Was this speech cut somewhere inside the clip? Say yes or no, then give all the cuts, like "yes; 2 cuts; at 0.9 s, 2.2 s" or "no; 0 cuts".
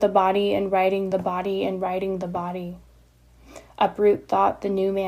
no; 0 cuts